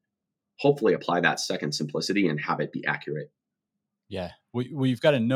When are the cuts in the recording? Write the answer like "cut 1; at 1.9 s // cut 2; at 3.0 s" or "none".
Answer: none